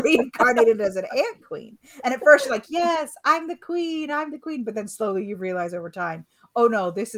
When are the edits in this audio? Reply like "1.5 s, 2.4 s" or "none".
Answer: none

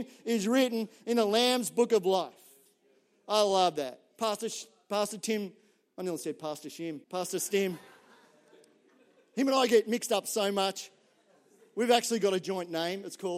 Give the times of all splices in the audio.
7.0 s

